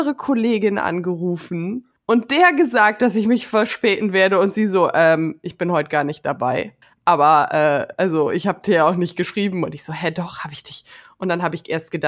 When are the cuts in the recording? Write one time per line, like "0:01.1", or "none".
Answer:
0:02.0
0:06.8